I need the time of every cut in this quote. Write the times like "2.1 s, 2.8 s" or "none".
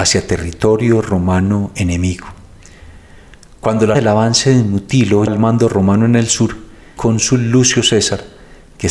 3.9 s, 5.3 s, 7.0 s